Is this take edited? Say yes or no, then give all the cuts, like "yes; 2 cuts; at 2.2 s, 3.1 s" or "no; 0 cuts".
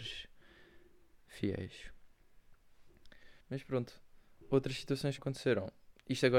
yes; 2 cuts; at 3.4 s, 5.2 s